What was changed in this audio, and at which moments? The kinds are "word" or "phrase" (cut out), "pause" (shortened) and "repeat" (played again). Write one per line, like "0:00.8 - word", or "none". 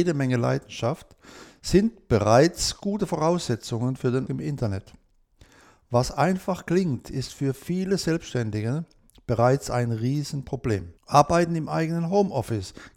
0:04.3 - word
0:11.0 - pause